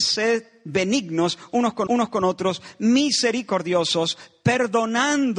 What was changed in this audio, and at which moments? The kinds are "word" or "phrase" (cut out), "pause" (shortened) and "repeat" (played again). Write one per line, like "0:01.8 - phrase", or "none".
0:01.9 - repeat